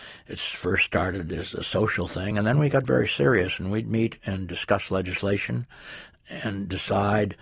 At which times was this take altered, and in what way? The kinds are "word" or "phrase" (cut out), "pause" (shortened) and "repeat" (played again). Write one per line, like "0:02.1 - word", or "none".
none